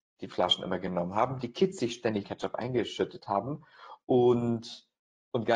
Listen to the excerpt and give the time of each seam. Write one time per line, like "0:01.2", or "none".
0:02.2